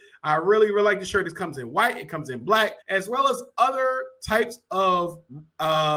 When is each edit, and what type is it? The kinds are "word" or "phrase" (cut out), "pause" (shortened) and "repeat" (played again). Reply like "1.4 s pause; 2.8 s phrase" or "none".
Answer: 2.8 s pause